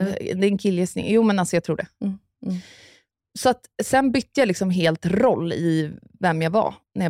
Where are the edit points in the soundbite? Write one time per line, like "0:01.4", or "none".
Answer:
none